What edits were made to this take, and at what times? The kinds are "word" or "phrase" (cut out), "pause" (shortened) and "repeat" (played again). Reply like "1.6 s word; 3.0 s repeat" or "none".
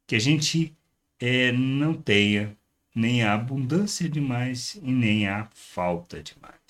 none